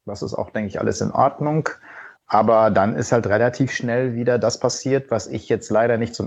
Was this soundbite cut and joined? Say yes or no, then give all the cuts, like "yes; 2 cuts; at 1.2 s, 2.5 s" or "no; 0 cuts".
yes; 1 cut; at 2.1 s